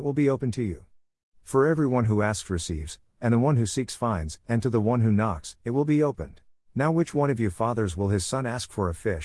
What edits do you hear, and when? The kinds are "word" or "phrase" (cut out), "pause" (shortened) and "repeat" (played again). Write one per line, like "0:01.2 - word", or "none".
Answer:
0:05.6 - pause
0:06.5 - pause